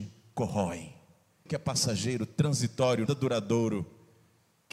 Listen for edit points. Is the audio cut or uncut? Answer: cut